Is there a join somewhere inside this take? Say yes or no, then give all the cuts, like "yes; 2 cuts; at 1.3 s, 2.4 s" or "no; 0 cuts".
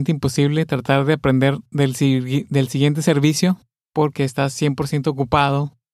no; 0 cuts